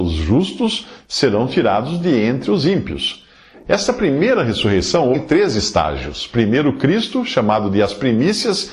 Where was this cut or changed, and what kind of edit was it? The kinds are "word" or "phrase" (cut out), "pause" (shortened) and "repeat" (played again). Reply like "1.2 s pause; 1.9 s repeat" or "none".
5.1 s word